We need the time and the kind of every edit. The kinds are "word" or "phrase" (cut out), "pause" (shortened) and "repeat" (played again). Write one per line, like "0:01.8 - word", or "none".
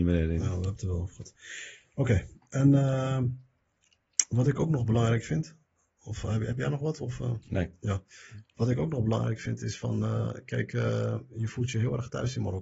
none